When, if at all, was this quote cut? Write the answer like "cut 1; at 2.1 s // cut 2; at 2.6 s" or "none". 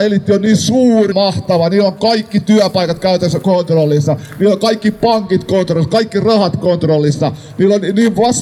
cut 1; at 1.1 s